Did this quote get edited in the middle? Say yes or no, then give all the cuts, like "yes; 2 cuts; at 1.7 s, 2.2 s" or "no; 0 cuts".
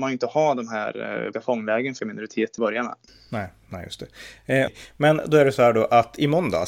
yes; 5 cuts; at 1.3 s, 2.0 s, 2.6 s, 3.1 s, 4.7 s